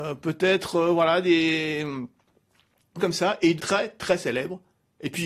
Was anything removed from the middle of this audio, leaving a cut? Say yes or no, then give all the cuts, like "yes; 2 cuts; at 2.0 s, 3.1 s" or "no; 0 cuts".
yes; 2 cuts; at 3.0 s, 3.6 s